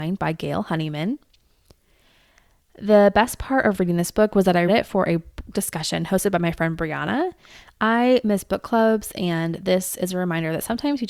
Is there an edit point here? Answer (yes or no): yes